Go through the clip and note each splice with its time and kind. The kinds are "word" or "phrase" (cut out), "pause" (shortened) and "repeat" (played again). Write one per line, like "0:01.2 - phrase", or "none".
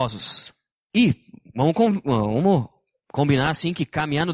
none

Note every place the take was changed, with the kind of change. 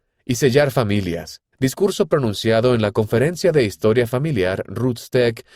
0:01.5 - pause

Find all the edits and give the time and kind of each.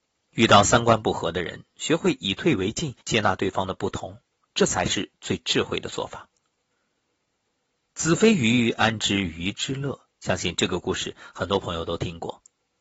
0:03.0 - pause
0:05.2 - pause
0:10.1 - pause

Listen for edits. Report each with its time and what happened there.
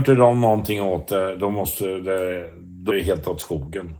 0:02.9 - word

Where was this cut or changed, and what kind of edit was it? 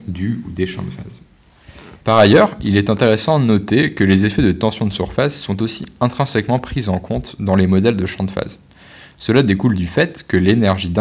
0:02.0 - pause

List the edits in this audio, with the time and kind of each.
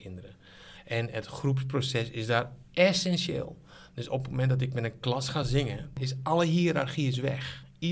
none

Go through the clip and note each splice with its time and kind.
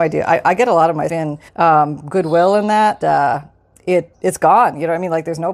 0:01.1 - word
0:01.5 - pause
0:03.0 - word
0:04.1 - word

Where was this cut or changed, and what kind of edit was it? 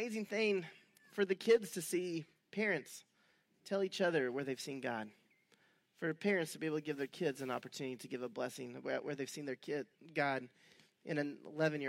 none

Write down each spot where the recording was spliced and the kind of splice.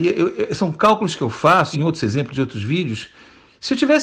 0:01.7 - phrase

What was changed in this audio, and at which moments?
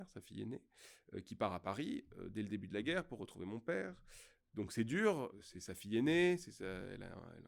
none

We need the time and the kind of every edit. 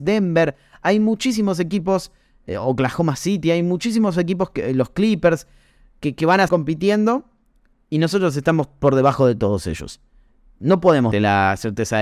0:06.5 - word
0:11.1 - word

